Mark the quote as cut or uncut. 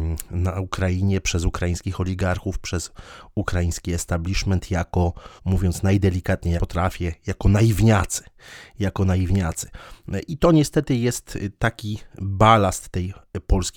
cut